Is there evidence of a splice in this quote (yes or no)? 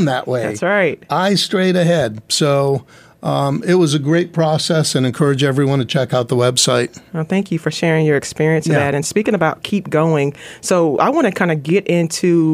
no